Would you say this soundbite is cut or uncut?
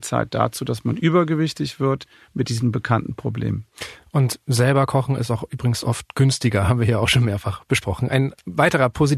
uncut